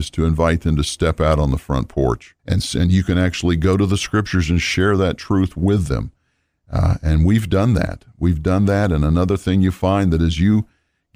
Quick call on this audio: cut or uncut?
cut